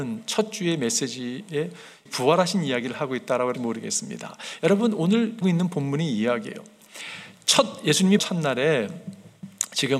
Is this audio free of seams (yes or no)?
no